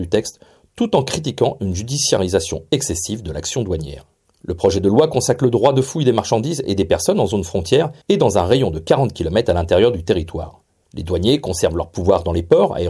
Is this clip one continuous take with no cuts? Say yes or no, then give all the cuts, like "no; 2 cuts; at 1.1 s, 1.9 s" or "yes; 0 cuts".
no; 3 cuts; at 4.2 s, 8.0 s, 10.8 s